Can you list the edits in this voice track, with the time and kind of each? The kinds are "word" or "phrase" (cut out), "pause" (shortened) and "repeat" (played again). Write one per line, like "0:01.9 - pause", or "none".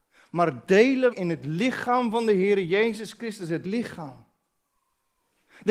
0:01.1 - word
0:03.6 - word